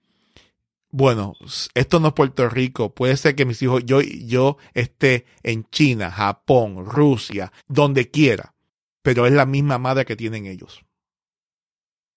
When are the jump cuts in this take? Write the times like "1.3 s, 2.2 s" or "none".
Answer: 7.6 s, 8.7 s